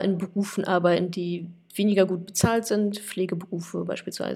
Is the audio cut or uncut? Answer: uncut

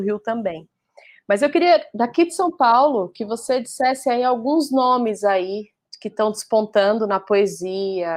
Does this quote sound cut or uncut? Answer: uncut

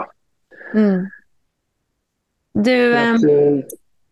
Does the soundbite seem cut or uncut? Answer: uncut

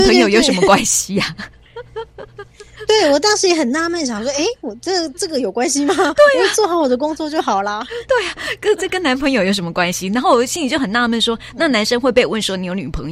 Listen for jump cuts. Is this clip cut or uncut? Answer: uncut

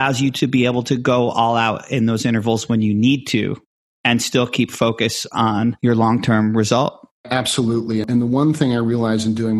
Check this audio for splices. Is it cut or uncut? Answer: uncut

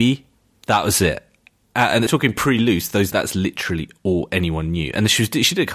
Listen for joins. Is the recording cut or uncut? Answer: cut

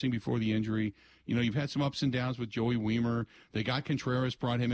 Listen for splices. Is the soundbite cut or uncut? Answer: uncut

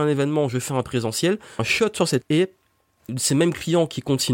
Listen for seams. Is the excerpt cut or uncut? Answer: cut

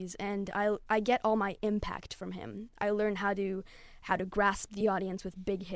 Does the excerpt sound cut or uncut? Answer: uncut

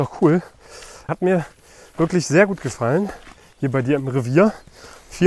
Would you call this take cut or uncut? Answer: uncut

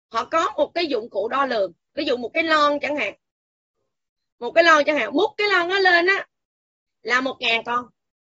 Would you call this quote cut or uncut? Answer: uncut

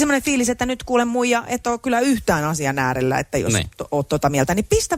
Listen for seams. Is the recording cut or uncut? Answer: uncut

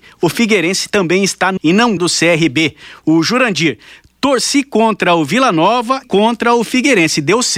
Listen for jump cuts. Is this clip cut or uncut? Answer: cut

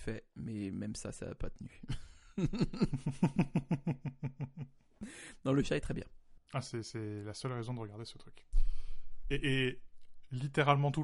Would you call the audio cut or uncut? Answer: uncut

